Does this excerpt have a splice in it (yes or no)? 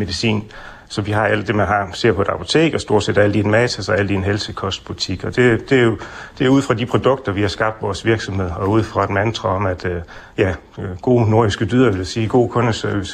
no